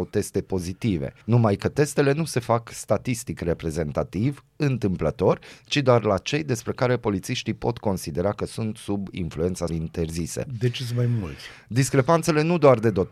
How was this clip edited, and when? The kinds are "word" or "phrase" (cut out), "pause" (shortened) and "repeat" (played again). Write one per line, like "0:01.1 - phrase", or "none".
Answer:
0:01.2 - pause
0:09.7 - word